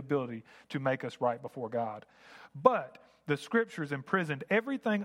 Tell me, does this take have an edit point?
no; 0 cuts

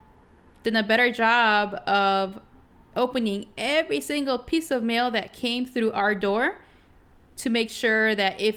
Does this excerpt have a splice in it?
no; 0 cuts

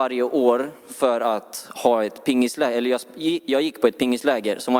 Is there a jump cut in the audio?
no; 0 cuts

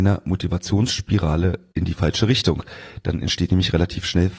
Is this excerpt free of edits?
yes; 0 cuts

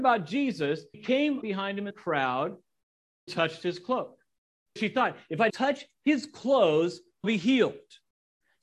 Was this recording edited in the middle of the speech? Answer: yes; 7 cuts; at 0.9 s, 1.4 s, 1.9 s, 3.3 s, 4.8 s, 5.5 s, 7.2 s

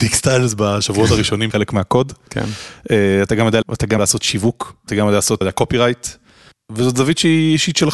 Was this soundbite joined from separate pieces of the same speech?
yes; 5 cuts; at 1.5 s, 3.6 s, 4.0 s, 4.9 s, 5.4 s

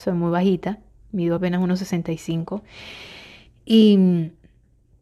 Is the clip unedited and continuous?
yes; 0 cuts

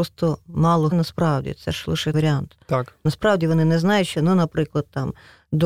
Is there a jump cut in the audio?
yes; 3 cuts; at 0.9 s, 2.1 s, 4.1 s

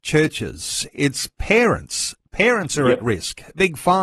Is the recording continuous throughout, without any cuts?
yes; 0 cuts

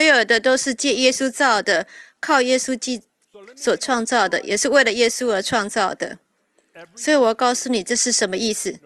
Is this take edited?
no; 0 cuts

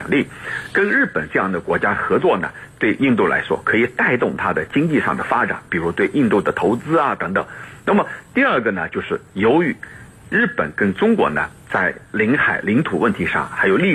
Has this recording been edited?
yes; 1 cut; at 9.3 s

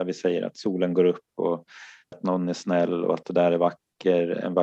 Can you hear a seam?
yes; 1 cut; at 2.1 s

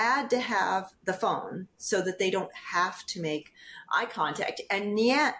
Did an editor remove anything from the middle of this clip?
no; 0 cuts

